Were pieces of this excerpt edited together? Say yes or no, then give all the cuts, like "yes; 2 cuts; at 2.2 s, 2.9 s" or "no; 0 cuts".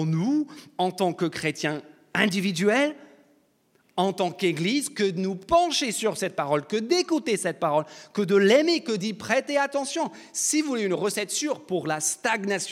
no; 0 cuts